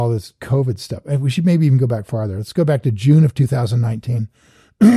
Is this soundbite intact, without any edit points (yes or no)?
yes